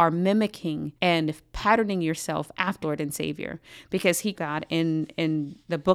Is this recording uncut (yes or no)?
no